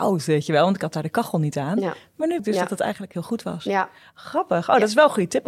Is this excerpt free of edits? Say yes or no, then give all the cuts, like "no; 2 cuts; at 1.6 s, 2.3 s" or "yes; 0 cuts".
no; 1 cut; at 2.4 s